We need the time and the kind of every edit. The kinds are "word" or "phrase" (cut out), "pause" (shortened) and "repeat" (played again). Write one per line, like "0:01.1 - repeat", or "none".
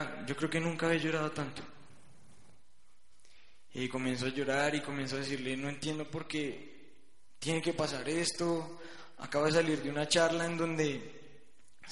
none